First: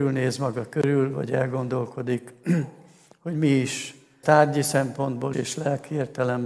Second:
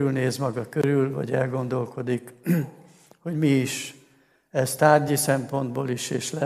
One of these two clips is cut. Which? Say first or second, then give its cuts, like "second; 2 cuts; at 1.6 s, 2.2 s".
first; 2 cuts; at 4.2 s, 5.3 s